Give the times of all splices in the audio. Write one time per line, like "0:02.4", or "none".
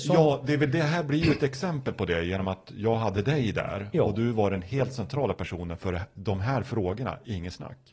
none